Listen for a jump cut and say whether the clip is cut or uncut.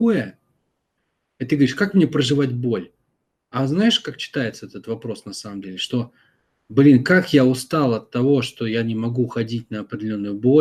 uncut